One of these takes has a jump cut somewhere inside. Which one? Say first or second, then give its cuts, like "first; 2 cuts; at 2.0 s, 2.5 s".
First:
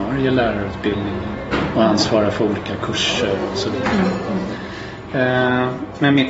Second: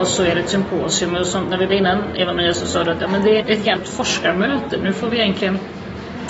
second; 3 cuts; at 1.7 s, 3.4 s, 3.8 s